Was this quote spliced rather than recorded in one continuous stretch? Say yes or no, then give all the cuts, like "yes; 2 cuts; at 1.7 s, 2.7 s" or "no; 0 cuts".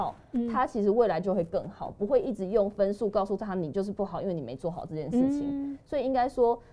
no; 0 cuts